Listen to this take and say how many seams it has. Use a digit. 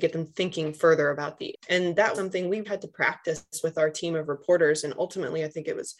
3